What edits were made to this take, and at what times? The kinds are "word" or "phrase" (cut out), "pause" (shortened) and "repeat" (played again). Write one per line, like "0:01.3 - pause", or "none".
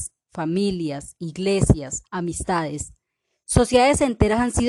0:02.0 - word